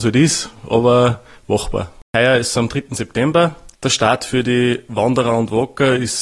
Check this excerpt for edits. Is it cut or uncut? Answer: cut